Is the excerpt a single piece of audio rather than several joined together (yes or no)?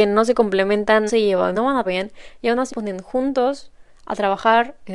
no